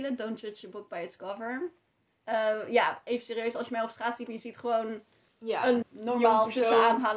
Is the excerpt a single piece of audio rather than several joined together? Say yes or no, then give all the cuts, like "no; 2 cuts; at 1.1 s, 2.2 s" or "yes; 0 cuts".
no; 3 cuts; at 4.3 s, 5.3 s, 5.8 s